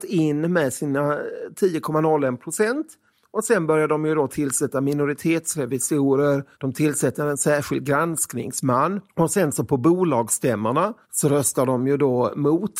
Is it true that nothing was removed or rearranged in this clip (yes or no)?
no